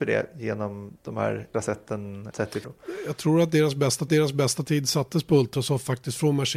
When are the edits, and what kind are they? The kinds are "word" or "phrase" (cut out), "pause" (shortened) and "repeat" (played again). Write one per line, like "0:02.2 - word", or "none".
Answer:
0:01.0 - pause
0:01.5 - word
0:02.3 - word
0:02.6 - word
0:04.1 - repeat

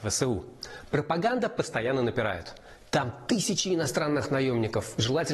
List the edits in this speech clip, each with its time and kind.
none

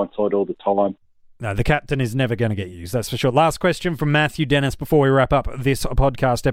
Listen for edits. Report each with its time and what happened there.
none

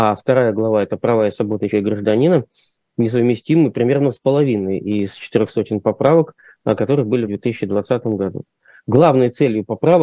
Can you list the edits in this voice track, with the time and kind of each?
0:01.7 - word
0:07.3 - word

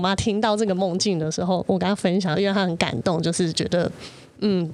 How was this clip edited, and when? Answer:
0:02.3 - phrase

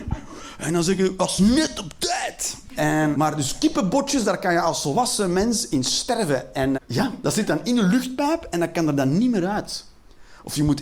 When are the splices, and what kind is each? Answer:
0:03.1 - word
0:06.7 - word

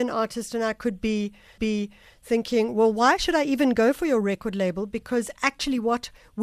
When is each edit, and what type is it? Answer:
0:01.6 - repeat

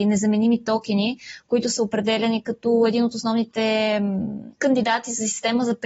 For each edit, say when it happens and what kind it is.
0:04.5 - pause

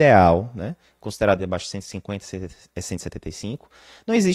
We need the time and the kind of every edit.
0:01.4 - phrase

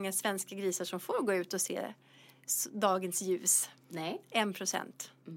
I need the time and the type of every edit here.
0:03.8 - pause

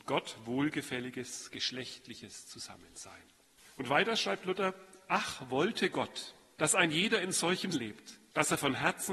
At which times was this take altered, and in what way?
0:07.7 - word

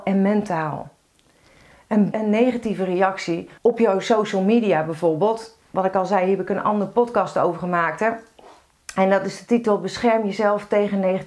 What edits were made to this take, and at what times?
0:02.1 - word
0:03.6 - pause

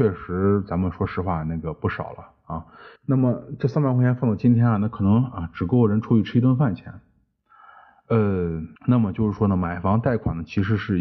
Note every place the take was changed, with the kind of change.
0:03.0 - pause
0:08.8 - pause

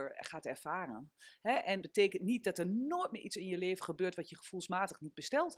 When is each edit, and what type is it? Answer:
0:01.8 - phrase

